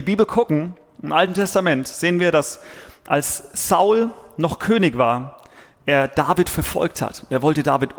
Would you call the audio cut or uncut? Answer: uncut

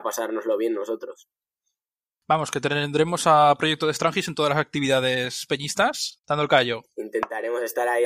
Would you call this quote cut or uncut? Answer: cut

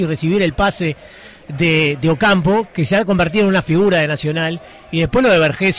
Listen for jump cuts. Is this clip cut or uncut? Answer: uncut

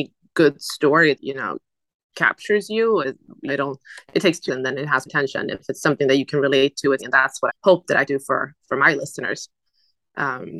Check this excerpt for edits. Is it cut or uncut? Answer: cut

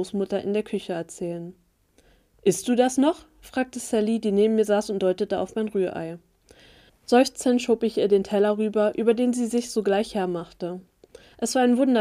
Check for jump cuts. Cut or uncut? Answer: uncut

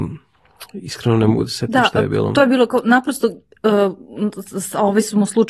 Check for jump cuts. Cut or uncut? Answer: uncut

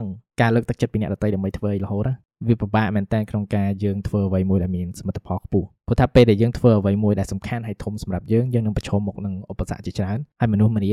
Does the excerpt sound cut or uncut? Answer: uncut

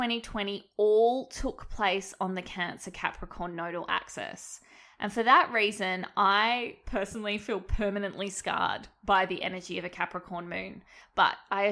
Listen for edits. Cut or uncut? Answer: uncut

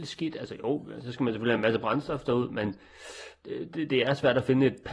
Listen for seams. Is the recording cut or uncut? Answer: uncut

